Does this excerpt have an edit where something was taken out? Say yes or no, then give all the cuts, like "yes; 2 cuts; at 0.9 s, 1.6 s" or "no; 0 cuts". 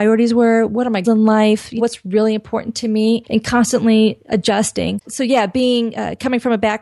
yes; 4 cuts; at 1.0 s, 1.8 s, 3.2 s, 5.0 s